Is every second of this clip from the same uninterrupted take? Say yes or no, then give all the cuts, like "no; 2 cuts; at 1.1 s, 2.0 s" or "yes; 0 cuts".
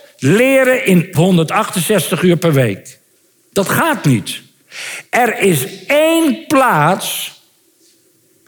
no; 2 cuts; at 1.1 s, 3.2 s